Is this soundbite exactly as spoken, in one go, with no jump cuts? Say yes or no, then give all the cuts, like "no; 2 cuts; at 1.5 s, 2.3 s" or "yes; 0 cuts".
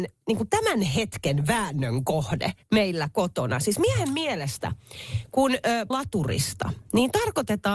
no; 2 cuts; at 2.6 s, 5.9 s